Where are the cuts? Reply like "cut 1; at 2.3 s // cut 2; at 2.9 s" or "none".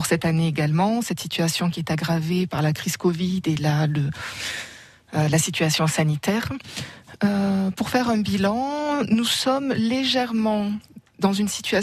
none